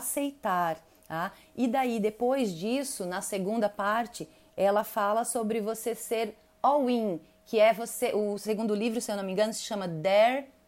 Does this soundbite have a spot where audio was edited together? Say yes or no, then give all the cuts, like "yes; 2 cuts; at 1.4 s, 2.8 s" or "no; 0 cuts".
no; 0 cuts